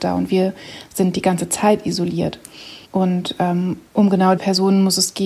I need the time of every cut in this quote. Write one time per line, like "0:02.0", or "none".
0:02.8
0:03.9
0:04.4